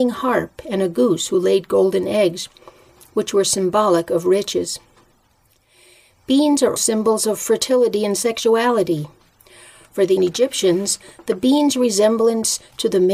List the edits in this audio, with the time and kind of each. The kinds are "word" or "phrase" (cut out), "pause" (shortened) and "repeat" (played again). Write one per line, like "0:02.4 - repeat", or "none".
0:06.8 - word
0:10.2 - word